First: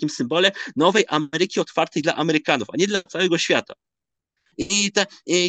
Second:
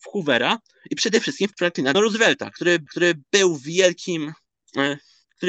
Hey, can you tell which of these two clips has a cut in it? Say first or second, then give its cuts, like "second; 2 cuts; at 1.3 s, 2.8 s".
second; 3 cuts; at 1.5 s, 1.9 s, 2.9 s